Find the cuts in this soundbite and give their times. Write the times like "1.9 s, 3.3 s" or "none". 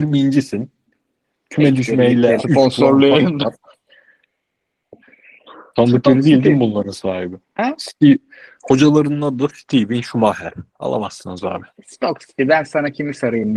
2.4 s, 7.4 s